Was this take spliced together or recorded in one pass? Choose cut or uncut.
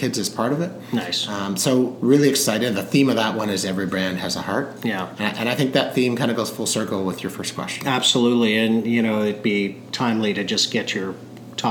uncut